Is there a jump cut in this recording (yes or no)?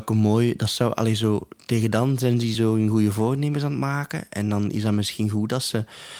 no